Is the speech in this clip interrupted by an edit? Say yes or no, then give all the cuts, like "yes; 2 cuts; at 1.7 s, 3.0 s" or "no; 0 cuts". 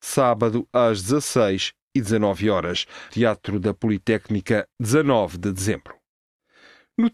yes; 2 cuts; at 3.1 s, 4.7 s